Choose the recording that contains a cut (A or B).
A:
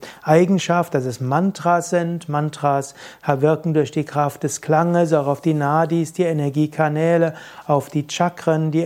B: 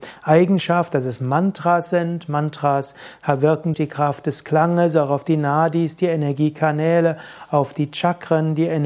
B